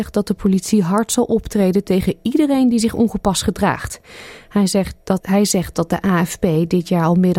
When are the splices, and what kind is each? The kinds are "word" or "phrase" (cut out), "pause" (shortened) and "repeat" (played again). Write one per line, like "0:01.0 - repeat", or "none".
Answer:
0:05.2 - word